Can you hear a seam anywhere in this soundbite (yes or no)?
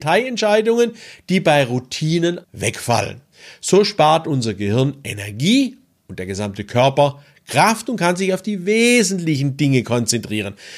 yes